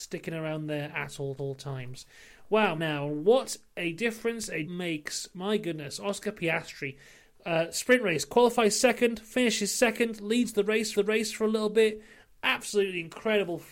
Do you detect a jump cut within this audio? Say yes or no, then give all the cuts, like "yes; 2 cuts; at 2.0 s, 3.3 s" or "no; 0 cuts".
yes; 4 cuts; at 1.4 s, 2.8 s, 4.6 s, 10.9 s